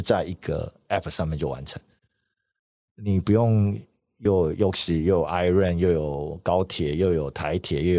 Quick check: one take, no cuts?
yes; 0 cuts

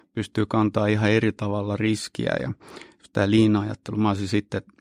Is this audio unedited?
yes; 0 cuts

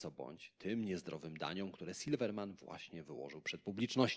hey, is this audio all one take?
yes; 0 cuts

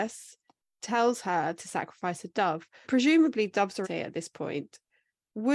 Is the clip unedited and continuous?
no; 3 cuts; at 1.6 s, 2.8 s, 3.8 s

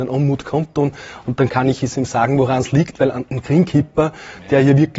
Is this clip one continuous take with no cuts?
yes; 0 cuts

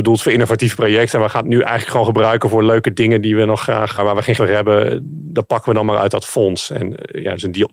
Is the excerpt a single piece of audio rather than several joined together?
no; 2 cuts; at 4.0 s, 4.4 s

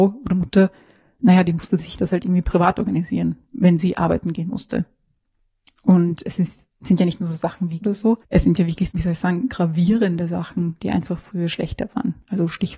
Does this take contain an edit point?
yes; 3 cuts; at 7.8 s, 8.2 s, 8.9 s

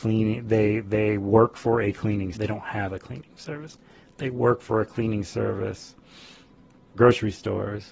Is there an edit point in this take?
yes; 2 cuts; at 2.3 s, 6.9 s

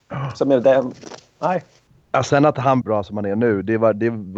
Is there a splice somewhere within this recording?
yes; 2 cuts; at 1.9 s, 2.8 s

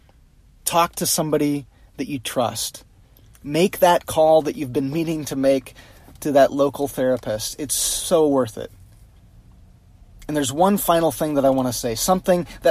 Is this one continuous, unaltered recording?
yes; 0 cuts

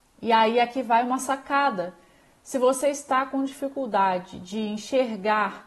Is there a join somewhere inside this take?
no; 0 cuts

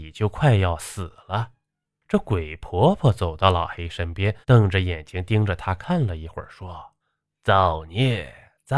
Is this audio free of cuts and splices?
no; 3 cuts; at 1.8 s, 4.4 s, 7.0 s

